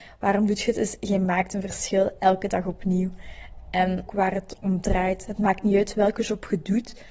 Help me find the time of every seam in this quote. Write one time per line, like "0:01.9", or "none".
0:04.1

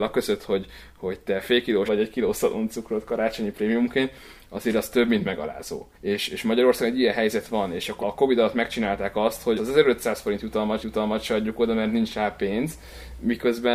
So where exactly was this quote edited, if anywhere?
0:01.9
0:05.9
0:08.0
0:09.6
0:10.8

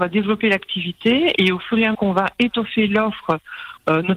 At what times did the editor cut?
0:01.4
0:01.9

